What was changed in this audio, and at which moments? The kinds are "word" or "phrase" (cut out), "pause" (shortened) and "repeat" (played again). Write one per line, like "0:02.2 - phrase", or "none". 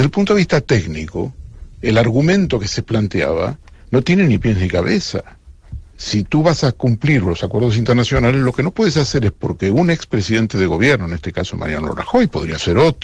none